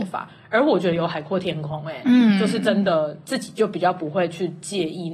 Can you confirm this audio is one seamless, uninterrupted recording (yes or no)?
yes